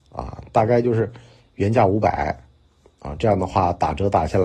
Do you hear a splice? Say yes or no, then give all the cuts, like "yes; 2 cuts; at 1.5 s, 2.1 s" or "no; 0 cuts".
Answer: no; 0 cuts